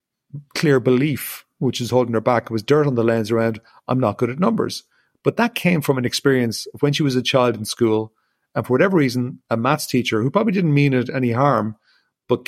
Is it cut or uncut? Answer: uncut